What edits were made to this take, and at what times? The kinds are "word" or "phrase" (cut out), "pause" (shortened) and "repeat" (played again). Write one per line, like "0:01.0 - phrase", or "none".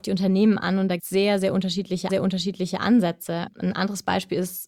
0:01.0 - word
0:02.1 - repeat

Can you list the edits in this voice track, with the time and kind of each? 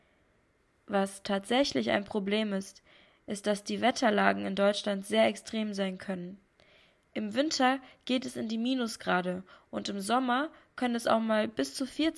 none

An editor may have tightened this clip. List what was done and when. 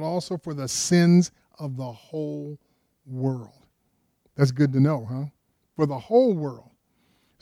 none

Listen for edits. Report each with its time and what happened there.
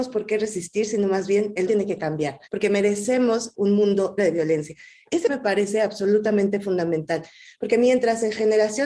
0:01.7 - word
0:02.5 - pause
0:03.5 - word
0:04.2 - word
0:05.3 - phrase

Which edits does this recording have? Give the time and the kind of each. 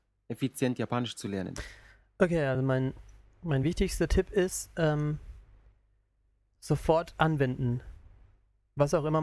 none

